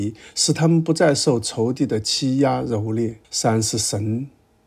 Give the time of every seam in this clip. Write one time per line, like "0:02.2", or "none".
0:03.2